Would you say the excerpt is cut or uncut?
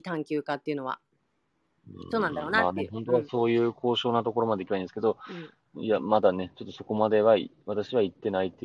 uncut